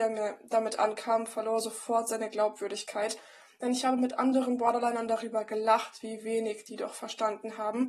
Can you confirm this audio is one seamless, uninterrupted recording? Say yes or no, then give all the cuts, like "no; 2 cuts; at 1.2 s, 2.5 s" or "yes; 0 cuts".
yes; 0 cuts